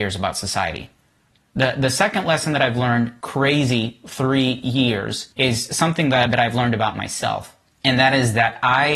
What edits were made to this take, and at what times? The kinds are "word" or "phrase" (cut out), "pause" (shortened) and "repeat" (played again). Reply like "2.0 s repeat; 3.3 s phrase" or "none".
3.2 s phrase; 5.3 s pause; 6.3 s word

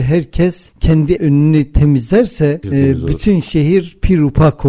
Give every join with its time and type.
1.2 s word; 2.6 s word

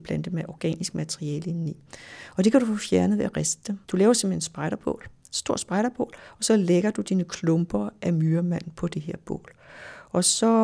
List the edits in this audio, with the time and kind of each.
3.8 s pause

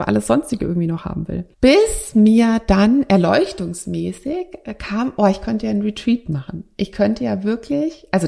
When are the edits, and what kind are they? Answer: 1.5 s pause

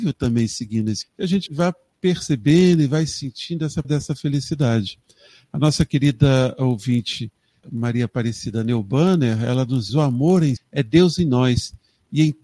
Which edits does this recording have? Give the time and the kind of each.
1.0 s word; 1.5 s word; 3.8 s word; 7.6 s word; 9.9 s word; 10.6 s word

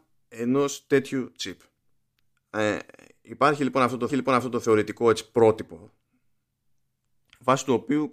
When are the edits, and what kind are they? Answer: 2.2 s pause; 4.1 s repeat

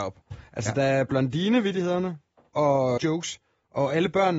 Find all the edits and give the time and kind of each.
3.0 s word

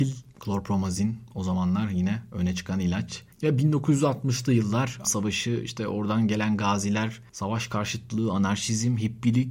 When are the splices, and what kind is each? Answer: 5.0 s phrase

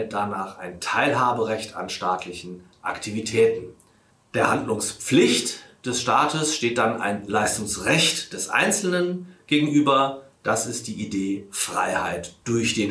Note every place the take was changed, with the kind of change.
4.1 s pause

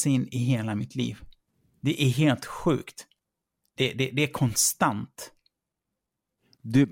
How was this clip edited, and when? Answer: 3.2 s pause

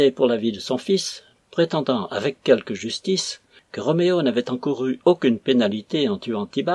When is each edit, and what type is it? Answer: none

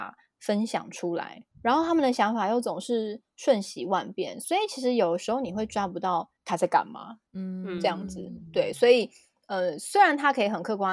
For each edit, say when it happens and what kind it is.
1.5 s pause; 6.4 s pause; 7.3 s pause

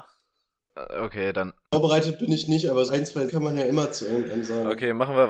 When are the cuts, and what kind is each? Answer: 1.6 s pause; 2.9 s word; 3.3 s word

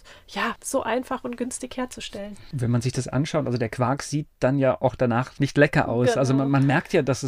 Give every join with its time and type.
none

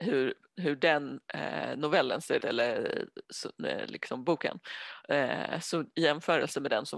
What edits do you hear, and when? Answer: 2.4 s word

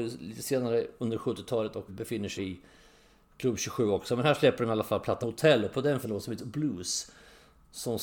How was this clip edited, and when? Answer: 1.9 s word; 2.4 s word; 5.2 s word; 6.0 s word; 6.4 s word

